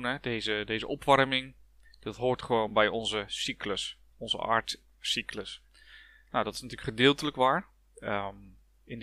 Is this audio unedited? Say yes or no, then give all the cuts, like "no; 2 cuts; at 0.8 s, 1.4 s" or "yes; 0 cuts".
yes; 0 cuts